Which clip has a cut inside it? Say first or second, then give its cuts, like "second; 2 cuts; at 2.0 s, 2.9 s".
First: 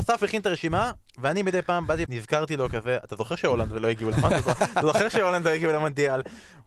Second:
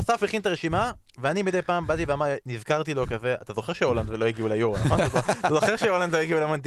first; 2 cuts; at 2.0 s, 4.1 s